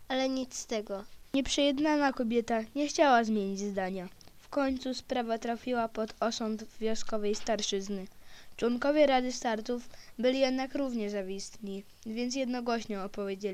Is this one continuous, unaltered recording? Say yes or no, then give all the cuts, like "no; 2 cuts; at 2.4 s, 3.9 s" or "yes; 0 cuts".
yes; 0 cuts